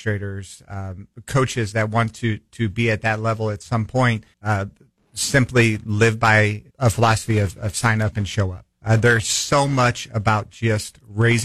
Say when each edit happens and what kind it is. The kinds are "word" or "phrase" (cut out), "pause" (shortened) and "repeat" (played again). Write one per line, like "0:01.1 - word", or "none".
0:04.3 - pause
0:06.7 - pause
0:08.7 - pause